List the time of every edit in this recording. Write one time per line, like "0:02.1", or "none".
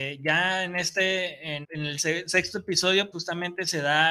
0:01.6
0:03.1

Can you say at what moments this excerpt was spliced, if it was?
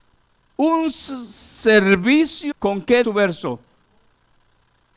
0:02.5
0:03.0

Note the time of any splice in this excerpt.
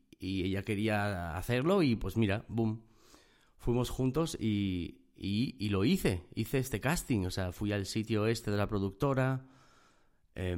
none

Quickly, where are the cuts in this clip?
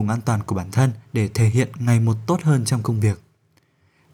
0:01.0

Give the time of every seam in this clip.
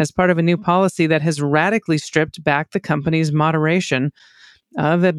none

